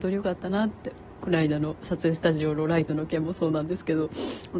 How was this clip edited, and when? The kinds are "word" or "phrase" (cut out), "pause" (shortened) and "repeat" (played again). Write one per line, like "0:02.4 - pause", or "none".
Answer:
0:01.2 - word